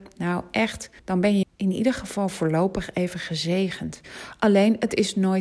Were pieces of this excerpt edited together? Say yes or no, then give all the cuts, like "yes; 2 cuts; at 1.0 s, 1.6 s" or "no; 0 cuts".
yes; 2 cuts; at 1.0 s, 1.4 s